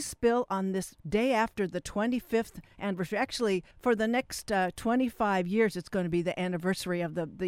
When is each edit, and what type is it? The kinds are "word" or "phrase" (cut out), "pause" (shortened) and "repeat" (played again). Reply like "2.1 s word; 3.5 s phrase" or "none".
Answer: 1.0 s pause; 3.7 s pause